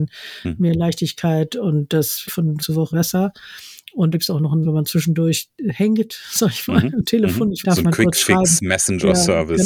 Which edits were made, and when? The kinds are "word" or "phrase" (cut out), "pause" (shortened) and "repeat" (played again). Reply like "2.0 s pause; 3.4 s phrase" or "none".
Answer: 2.3 s word; 2.6 s word; 2.9 s word; 4.1 s word; 4.6 s word; 7.6 s word